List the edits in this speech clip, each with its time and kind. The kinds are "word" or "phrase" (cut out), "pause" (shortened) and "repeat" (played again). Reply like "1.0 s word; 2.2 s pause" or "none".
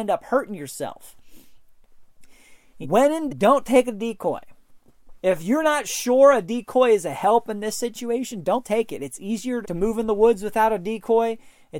2.8 s word; 3.3 s word; 9.6 s word

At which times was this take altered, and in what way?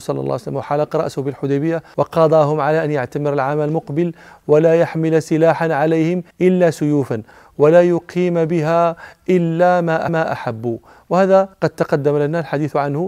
6.3 s pause; 10.1 s repeat; 11.5 s pause

